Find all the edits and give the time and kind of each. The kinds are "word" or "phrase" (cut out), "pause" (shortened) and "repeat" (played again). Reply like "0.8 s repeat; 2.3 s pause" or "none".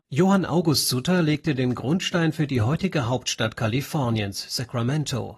none